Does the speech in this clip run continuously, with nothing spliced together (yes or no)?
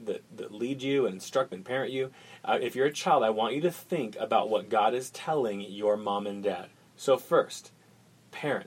no